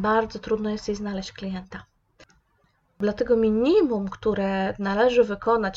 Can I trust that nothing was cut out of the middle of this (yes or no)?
yes